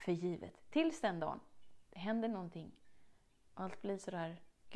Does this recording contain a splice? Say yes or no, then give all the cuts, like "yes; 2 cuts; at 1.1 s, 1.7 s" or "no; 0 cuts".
no; 0 cuts